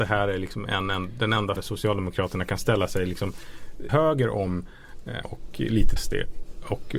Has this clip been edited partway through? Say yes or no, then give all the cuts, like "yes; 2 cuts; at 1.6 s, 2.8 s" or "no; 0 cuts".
yes; 4 cuts; at 1.6 s, 3.9 s, 5.2 s, 6.0 s